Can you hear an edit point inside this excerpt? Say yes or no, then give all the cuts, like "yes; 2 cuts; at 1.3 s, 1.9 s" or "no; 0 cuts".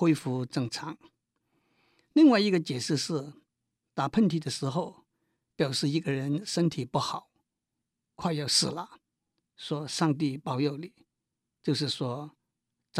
no; 0 cuts